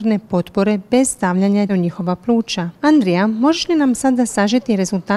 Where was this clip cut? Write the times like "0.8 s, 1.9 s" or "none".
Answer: 1.7 s, 2.7 s